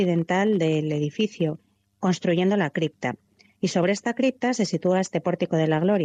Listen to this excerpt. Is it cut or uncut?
uncut